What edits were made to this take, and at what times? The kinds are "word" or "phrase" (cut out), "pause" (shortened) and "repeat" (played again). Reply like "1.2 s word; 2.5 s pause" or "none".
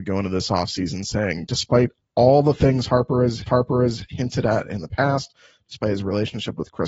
3.5 s repeat